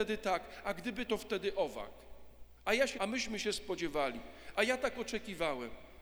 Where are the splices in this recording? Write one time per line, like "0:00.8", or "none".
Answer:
0:01.1
0:02.9